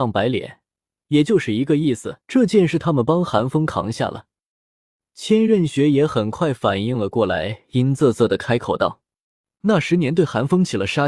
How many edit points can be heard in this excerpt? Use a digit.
1